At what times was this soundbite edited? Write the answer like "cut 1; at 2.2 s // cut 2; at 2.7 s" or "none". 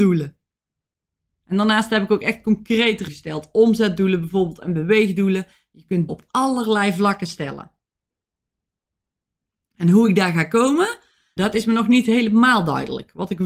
cut 1; at 3.1 s // cut 2; at 6.1 s // cut 3; at 11.4 s